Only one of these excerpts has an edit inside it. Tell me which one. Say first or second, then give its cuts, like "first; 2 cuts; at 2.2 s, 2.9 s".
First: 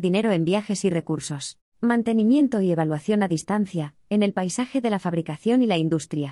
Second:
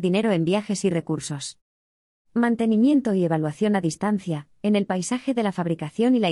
first; 1 cut; at 1.7 s